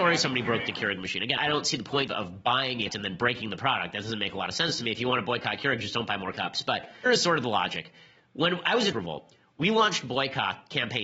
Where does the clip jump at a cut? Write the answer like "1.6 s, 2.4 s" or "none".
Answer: 1.4 s, 2.1 s, 2.9 s, 6.3 s, 7.1 s, 8.9 s